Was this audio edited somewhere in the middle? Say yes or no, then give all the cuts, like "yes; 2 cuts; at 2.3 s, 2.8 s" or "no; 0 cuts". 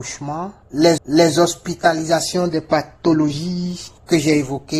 yes; 1 cut; at 1.0 s